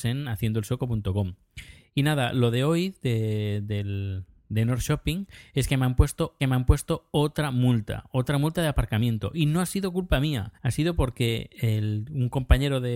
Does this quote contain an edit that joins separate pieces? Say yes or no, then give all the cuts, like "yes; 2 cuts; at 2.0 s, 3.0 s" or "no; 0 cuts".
yes; 2 cuts; at 6.4 s, 10.5 s